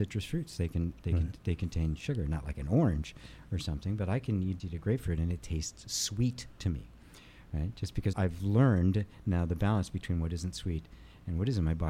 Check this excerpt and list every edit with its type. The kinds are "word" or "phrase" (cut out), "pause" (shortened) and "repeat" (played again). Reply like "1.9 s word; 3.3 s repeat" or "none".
4.6 s word; 8.1 s word